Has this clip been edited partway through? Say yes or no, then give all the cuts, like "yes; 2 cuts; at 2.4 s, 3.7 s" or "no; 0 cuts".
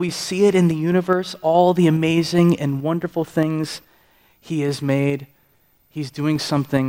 no; 0 cuts